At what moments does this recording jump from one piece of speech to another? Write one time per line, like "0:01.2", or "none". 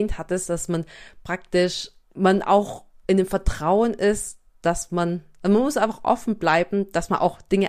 0:02.0